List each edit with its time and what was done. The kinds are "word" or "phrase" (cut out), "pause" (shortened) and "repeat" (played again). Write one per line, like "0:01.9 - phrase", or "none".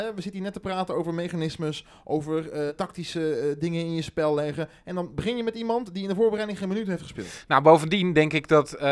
0:02.7 - word